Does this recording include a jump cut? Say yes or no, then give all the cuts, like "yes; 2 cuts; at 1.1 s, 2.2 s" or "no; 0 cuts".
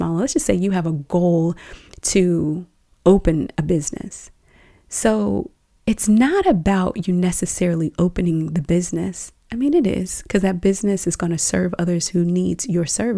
no; 0 cuts